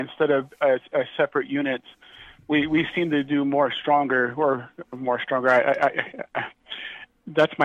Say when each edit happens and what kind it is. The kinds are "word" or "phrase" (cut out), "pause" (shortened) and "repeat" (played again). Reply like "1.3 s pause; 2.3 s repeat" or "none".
none